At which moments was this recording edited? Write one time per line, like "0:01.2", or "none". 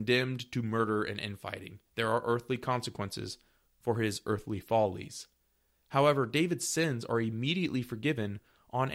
none